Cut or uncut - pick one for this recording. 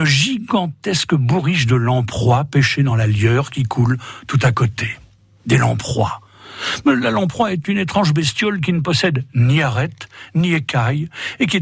uncut